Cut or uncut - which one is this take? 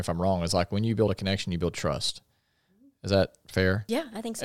uncut